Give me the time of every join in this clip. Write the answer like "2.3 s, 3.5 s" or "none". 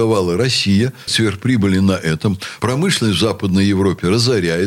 1.1 s